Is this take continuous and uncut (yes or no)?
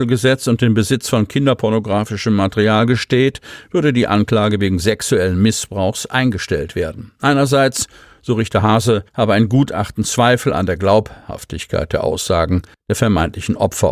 no